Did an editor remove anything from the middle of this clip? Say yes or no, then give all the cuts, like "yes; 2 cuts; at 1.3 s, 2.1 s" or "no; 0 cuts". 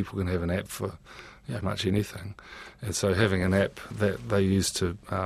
yes; 2 cuts; at 1.6 s, 3.9 s